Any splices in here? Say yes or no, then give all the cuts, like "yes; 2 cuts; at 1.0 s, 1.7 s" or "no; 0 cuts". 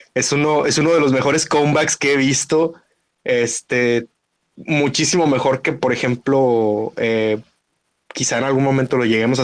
no; 0 cuts